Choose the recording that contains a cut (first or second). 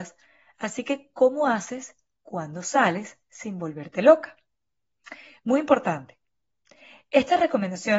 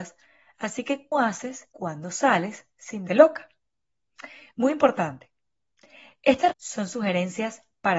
second